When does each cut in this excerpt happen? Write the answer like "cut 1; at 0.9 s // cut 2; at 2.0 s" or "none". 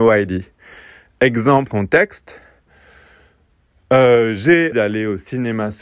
cut 1; at 1.7 s // cut 2; at 4.7 s